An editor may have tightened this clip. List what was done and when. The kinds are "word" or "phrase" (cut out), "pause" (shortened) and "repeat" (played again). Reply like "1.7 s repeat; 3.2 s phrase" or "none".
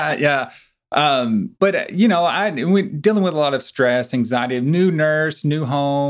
1.5 s pause